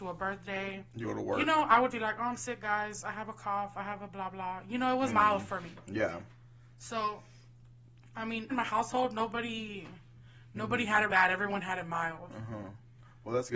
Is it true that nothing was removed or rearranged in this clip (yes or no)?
no